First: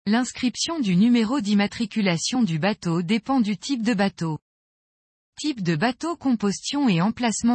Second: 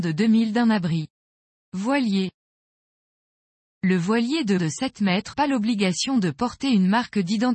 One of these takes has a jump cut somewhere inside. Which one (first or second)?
second